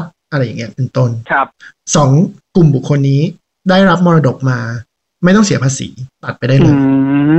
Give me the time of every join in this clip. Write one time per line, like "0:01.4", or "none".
none